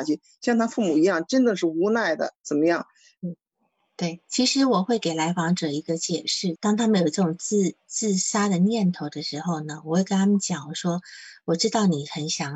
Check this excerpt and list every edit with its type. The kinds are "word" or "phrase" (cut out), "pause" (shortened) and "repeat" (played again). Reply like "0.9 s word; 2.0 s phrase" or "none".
2.4 s pause; 6.6 s phrase